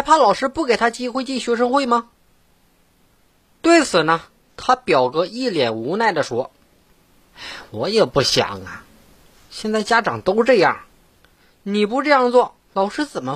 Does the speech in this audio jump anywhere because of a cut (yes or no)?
no